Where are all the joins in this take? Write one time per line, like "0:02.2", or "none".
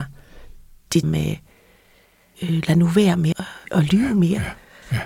0:01.0
0:02.7
0:03.3